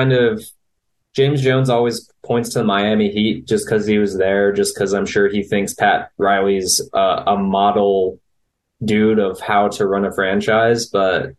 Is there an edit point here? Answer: no; 0 cuts

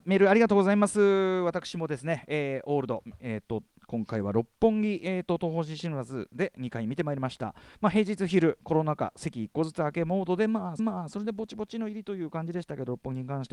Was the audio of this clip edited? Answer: yes; 2 cuts; at 7.7 s, 10.8 s

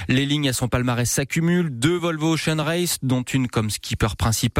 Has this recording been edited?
no; 0 cuts

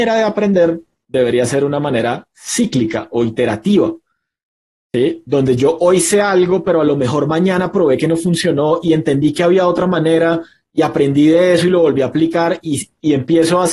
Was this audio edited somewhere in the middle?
no; 0 cuts

